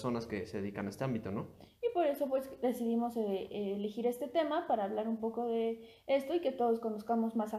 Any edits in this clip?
no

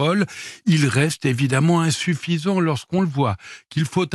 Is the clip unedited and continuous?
yes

